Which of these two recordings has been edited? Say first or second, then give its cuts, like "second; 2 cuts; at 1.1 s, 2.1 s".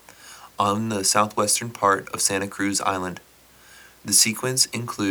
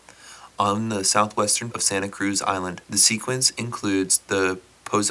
second; 2 cuts; at 1.7 s, 2.8 s